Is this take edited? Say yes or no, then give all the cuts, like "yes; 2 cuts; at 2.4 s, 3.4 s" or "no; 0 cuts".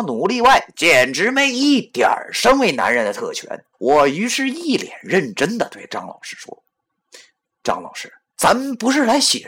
yes; 3 cuts; at 3.7 s, 6.7 s, 8.3 s